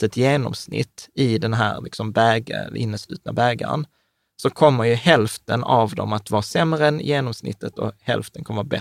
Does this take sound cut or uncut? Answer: uncut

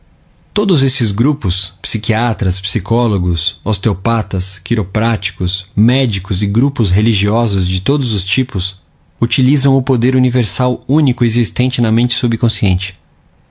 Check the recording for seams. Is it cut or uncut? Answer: uncut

